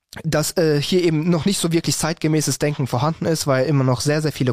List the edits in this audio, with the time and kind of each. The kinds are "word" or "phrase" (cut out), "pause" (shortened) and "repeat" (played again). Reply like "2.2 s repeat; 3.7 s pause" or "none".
none